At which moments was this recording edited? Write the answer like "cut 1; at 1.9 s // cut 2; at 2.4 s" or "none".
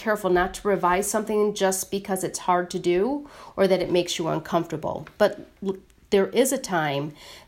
none